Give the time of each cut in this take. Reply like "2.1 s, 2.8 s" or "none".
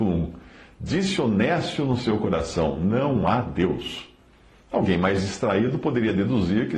none